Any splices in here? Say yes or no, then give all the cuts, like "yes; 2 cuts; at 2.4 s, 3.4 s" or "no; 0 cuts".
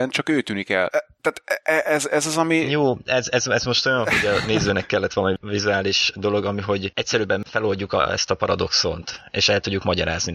no; 0 cuts